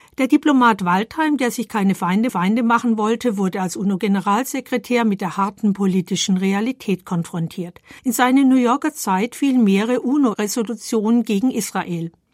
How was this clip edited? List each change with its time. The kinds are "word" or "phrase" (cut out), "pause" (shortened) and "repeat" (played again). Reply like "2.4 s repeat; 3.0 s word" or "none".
2.3 s repeat; 8.0 s pause